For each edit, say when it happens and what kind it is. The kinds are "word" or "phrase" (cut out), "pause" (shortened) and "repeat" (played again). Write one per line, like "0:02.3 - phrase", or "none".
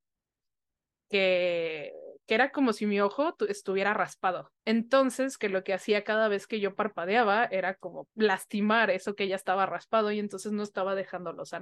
0:04.6 - pause
0:08.1 - word